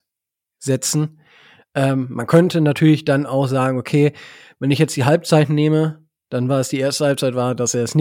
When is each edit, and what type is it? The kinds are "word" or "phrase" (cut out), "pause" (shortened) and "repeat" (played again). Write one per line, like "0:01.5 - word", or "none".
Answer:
none

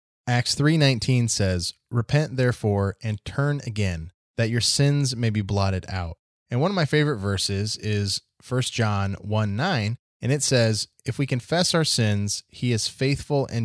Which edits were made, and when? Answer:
none

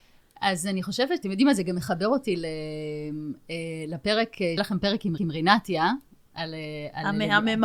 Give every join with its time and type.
0:01.2 - word
0:04.6 - word
0:05.2 - repeat

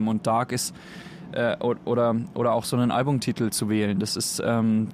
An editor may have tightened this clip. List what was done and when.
none

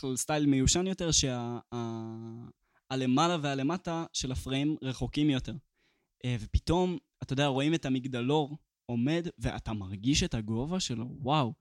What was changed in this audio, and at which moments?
none

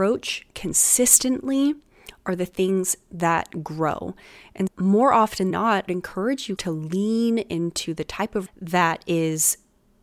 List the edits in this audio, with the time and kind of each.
0:04.7 - word
0:05.5 - word
0:05.9 - phrase
0:06.6 - word
0:08.5 - word

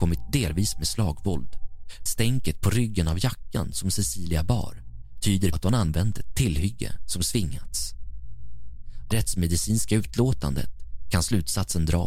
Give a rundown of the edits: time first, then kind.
0:02.1 - word
0:05.5 - word
0:09.1 - word

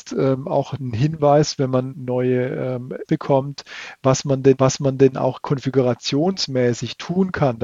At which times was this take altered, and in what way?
0:01.9 - word
0:03.0 - word
0:04.6 - repeat

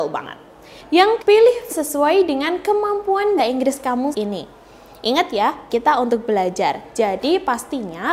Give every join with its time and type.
0:01.2 - word
0:01.7 - word
0:03.4 - word
0:04.1 - word
0:05.7 - word

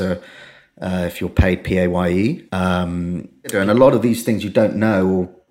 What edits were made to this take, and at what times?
0:02.5 - pause

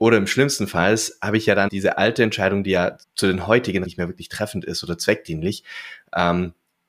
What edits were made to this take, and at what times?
0:01.7 - word
0:03.0 - pause
0:03.8 - word

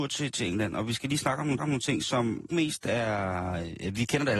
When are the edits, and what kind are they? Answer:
0:01.6 - repeat
0:02.5 - word

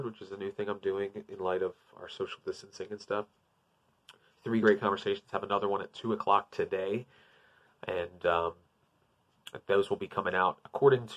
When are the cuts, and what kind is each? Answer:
none

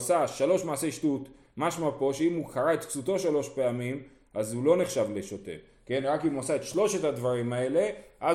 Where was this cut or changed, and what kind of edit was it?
none

